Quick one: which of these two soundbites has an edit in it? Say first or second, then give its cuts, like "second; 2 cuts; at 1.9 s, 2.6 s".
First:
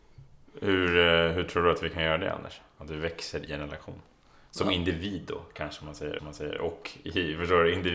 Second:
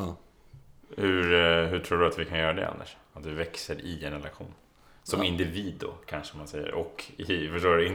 first; 2 cuts; at 3.5 s, 6.2 s